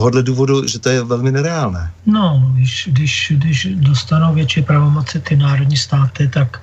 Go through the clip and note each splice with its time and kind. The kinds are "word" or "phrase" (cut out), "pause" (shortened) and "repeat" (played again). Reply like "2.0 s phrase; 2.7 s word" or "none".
2.0 s pause